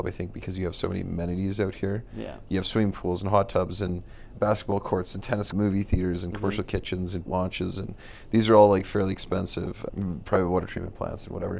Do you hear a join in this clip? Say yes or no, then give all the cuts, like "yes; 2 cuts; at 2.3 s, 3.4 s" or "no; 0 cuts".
yes; 4 cuts; at 4.4 s, 5.5 s, 7.3 s, 9.9 s